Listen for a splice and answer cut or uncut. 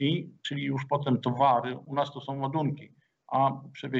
uncut